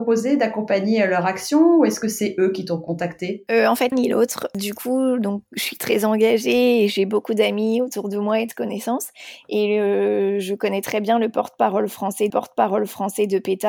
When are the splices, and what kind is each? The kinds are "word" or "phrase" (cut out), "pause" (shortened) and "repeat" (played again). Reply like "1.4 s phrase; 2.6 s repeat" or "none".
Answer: 3.9 s phrase; 12.3 s repeat